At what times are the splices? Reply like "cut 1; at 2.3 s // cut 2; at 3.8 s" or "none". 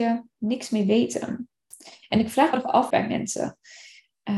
cut 1; at 2.5 s // cut 2; at 2.9 s